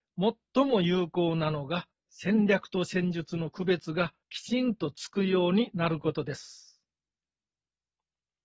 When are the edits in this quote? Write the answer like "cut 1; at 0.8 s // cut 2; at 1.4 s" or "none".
cut 1; at 1.9 s // cut 2; at 4.2 s

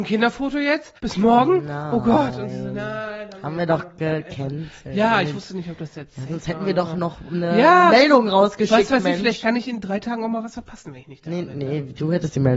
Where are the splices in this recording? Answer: cut 1; at 1.0 s

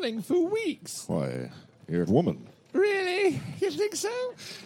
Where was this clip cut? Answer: cut 1; at 2.1 s

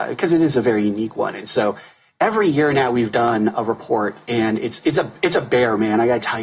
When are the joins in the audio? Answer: none

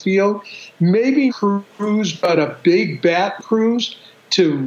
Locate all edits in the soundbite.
cut 1; at 1.3 s // cut 2; at 3.4 s

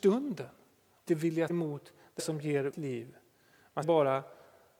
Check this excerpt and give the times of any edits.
cut 1; at 1.1 s // cut 2; at 1.5 s // cut 3; at 2.2 s // cut 4; at 2.7 s // cut 5; at 3.8 s

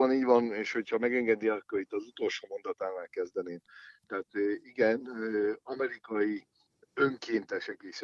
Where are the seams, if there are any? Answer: none

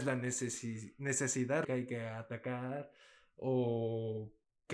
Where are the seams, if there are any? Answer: cut 1; at 1.6 s

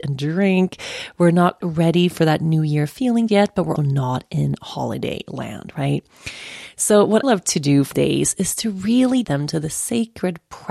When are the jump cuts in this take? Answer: cut 1; at 1.6 s // cut 2; at 3.3 s // cut 3; at 3.8 s // cut 4; at 7.2 s // cut 5; at 7.9 s // cut 6; at 9.2 s

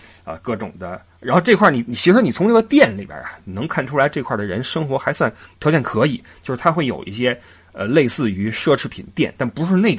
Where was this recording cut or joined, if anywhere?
cut 1; at 5.5 s

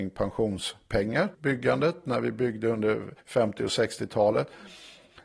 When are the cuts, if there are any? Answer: cut 1; at 1.3 s // cut 2; at 3.2 s

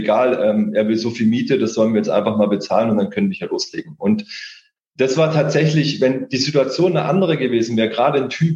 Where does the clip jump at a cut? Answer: none

